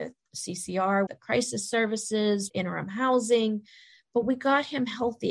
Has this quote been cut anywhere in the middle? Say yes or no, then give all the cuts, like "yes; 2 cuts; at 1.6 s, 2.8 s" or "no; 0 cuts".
yes; 2 cuts; at 1.1 s, 2.5 s